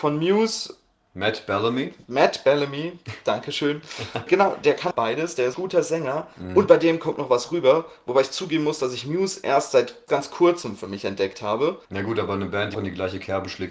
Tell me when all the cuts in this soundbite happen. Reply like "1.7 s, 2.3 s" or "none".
4.3 s, 4.9 s, 5.5 s, 10.1 s, 11.8 s, 12.7 s